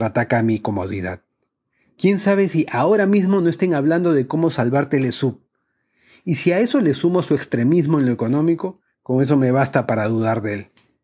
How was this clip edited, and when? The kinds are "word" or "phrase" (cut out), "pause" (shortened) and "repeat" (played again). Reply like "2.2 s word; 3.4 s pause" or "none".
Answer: none

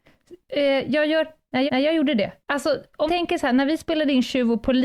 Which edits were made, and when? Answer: 1.7 s repeat; 2.4 s pause; 3.1 s word

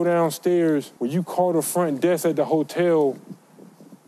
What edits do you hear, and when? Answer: 1.0 s pause

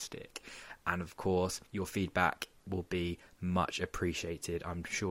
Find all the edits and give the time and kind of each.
1.7 s pause

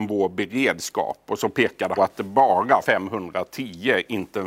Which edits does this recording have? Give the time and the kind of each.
2.0 s phrase; 2.8 s word

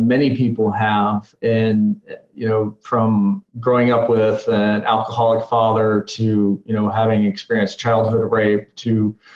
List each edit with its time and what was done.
3.5 s pause

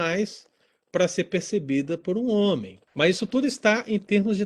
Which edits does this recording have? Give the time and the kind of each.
2.9 s pause

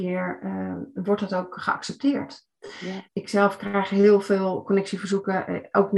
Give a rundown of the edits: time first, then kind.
3.0 s pause

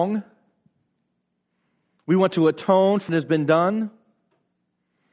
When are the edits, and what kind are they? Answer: 3.1 s phrase

